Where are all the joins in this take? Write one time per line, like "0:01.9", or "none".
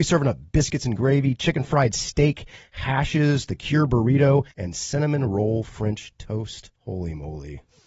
0:04.5
0:06.8